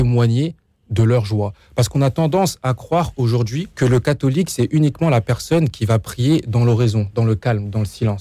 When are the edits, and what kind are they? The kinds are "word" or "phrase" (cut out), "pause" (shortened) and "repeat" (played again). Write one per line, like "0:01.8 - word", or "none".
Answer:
0:03.7 - pause